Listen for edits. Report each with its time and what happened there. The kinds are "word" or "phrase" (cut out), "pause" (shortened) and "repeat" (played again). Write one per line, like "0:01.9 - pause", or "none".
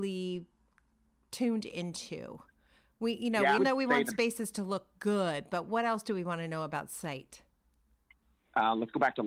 0:03.6 - word